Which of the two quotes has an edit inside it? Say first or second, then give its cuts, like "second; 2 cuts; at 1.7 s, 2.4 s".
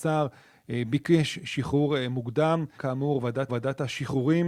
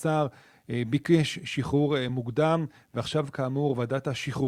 first; 2 cuts; at 2.8 s, 3.5 s